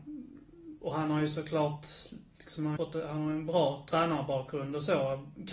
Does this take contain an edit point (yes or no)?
yes